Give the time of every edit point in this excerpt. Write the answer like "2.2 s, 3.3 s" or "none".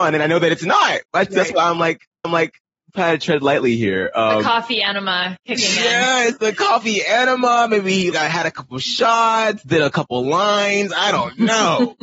2.2 s, 8.1 s